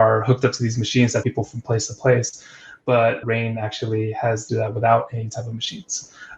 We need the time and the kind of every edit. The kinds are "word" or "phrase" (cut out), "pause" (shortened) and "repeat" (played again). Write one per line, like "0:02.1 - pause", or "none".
0:01.2 - word
0:03.2 - word
0:04.5 - phrase